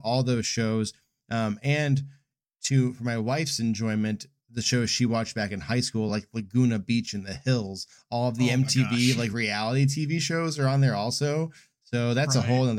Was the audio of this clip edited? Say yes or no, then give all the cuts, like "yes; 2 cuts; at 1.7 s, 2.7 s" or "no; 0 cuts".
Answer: no; 0 cuts